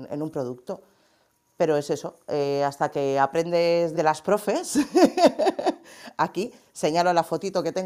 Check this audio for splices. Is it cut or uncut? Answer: cut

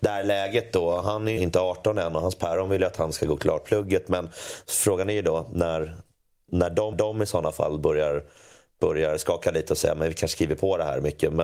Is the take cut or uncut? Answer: cut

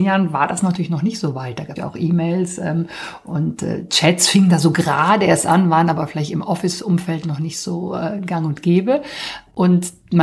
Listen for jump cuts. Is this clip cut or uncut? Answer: cut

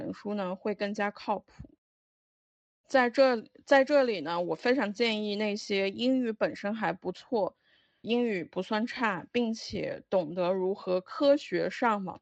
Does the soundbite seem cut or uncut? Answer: cut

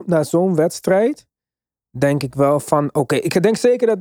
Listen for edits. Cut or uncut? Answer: uncut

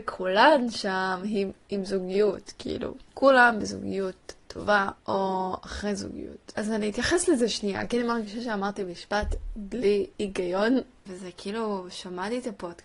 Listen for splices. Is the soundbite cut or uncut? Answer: cut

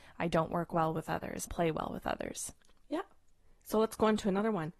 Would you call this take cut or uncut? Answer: cut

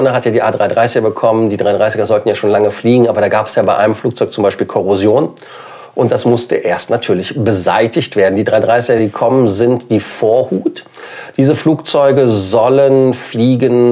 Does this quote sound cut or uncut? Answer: uncut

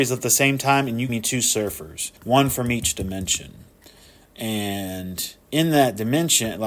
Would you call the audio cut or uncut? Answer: cut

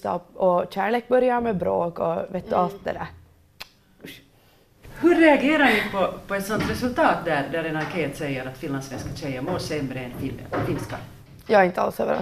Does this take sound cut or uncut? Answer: uncut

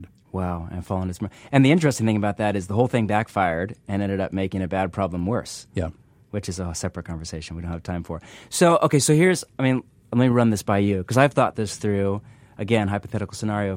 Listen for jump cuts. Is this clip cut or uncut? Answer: uncut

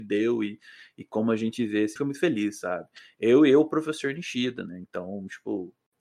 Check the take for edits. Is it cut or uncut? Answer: cut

